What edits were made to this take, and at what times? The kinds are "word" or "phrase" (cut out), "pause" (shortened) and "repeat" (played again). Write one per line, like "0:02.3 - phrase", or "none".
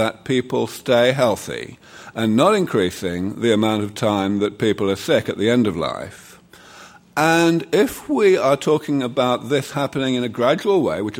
none